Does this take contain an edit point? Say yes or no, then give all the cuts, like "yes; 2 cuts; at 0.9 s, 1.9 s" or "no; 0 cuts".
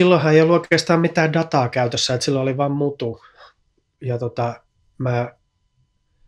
no; 0 cuts